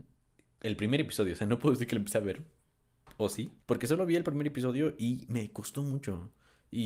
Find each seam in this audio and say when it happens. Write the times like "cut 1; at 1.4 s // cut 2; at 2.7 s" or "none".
cut 1; at 3.6 s

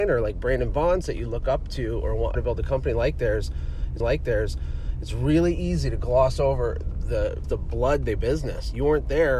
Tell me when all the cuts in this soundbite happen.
cut 1; at 1.0 s // cut 2; at 2.3 s // cut 3; at 4.0 s // cut 4; at 7.4 s // cut 5; at 8.2 s

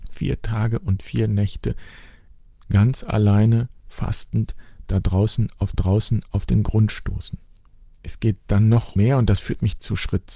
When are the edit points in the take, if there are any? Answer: cut 1; at 5.7 s // cut 2; at 9.0 s

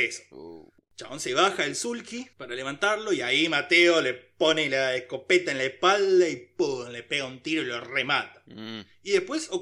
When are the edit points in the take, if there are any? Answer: cut 1; at 2.3 s

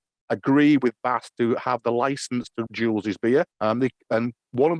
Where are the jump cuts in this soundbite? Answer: cut 1; at 2.7 s // cut 2; at 3.5 s

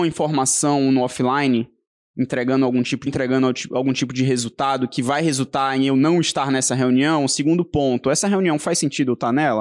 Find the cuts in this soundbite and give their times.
cut 1; at 3.1 s

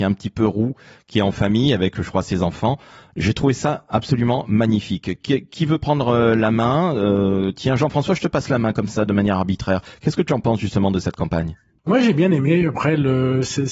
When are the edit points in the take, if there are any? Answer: none

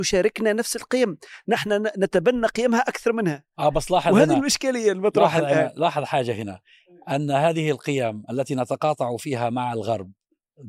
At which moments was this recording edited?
none

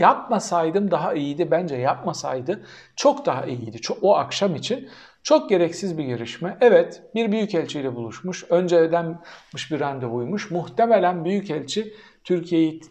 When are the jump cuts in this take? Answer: none

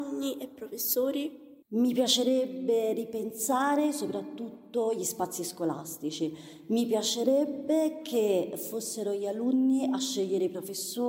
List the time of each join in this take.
cut 1; at 1.6 s

